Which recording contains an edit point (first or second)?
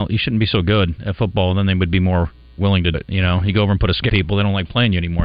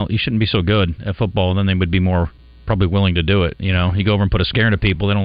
first